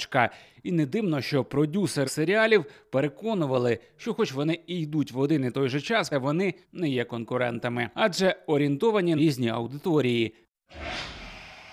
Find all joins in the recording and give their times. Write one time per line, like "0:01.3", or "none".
0:02.0
0:06.1
0:06.6
0:07.9
0:09.2